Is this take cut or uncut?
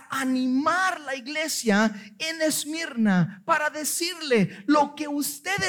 uncut